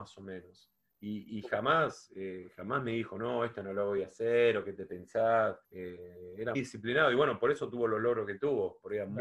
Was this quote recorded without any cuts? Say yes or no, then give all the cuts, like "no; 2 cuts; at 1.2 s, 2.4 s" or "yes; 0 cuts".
no; 2 cuts; at 5.6 s, 6.5 s